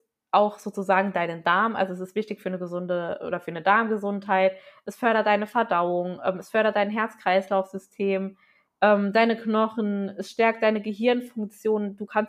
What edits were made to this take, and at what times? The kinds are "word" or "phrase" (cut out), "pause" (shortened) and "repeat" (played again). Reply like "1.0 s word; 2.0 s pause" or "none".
none